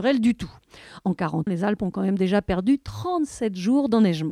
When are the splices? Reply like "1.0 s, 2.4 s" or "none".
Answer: 1.5 s